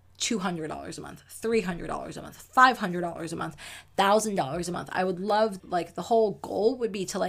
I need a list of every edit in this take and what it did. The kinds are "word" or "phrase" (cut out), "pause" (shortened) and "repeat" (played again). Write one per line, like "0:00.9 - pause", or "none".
0:05.6 - word